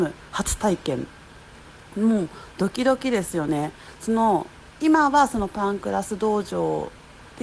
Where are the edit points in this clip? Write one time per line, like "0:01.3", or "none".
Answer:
0:04.8

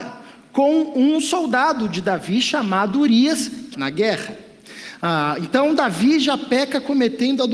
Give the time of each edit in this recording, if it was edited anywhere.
0:03.7

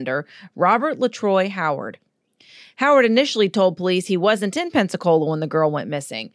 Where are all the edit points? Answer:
none

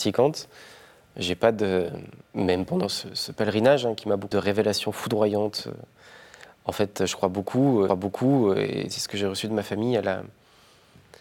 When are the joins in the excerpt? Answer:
0:02.2
0:04.3
0:07.9

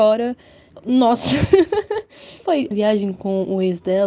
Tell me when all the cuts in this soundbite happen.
0:02.4
0:02.7

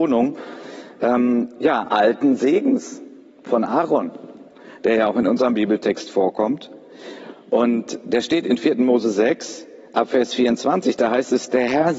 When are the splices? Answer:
0:01.9

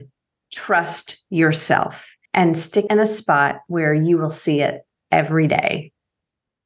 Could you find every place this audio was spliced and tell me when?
0:02.3
0:02.9

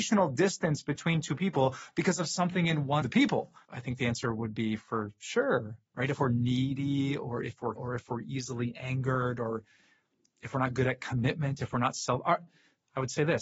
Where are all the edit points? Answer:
0:03.0
0:03.6
0:05.9
0:07.8

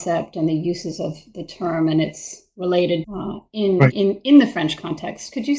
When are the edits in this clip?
0:03.0

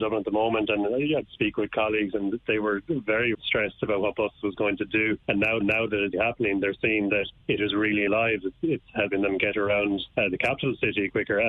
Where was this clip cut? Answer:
0:03.3
0:04.3
0:05.2
0:05.6
0:06.1
0:07.4
0:08.1
0:10.1

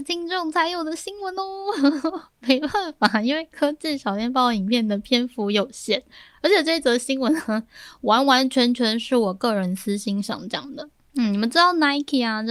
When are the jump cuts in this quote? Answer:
none

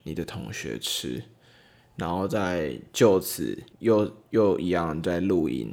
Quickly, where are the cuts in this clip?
0:03.7

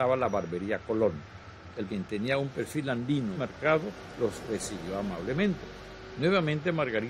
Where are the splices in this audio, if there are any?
0:01.9
0:03.4

